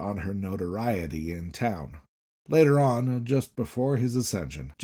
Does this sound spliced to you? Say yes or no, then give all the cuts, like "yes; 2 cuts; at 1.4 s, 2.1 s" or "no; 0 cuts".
yes; 1 cut; at 2.3 s